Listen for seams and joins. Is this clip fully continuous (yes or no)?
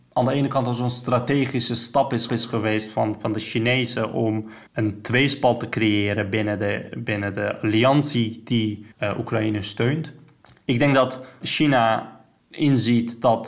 no